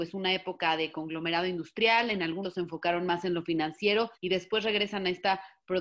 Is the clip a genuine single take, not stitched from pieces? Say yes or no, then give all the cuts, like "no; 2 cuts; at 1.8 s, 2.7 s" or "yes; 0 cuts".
no; 2 cuts; at 2.4 s, 4.1 s